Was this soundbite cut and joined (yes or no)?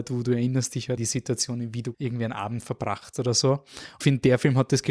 yes